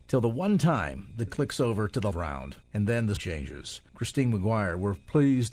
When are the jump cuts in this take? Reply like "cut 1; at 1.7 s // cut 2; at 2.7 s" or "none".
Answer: cut 1; at 1.3 s // cut 2; at 2.1 s // cut 3; at 2.6 s // cut 4; at 3.2 s // cut 5; at 3.9 s